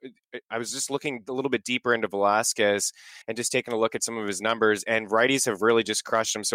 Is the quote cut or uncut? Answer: cut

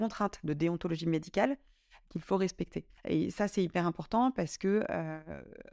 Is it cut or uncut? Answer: cut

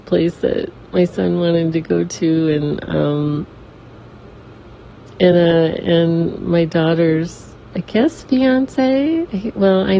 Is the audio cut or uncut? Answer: uncut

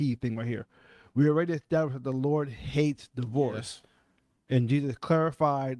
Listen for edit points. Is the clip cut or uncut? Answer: uncut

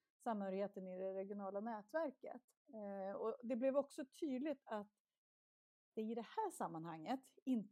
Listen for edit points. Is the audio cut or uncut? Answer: uncut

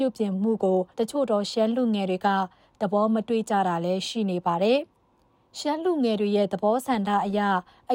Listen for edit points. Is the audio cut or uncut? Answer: cut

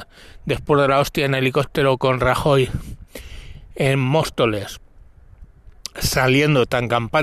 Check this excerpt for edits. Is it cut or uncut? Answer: uncut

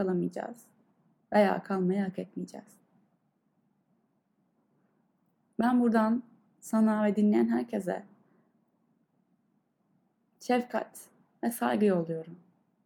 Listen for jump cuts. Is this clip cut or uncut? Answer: uncut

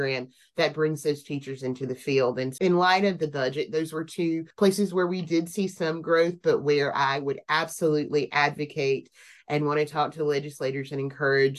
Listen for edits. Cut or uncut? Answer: cut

